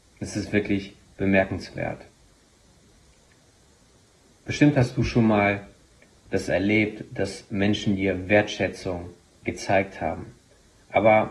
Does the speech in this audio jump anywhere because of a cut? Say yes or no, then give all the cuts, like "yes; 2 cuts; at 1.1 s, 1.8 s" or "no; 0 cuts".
no; 0 cuts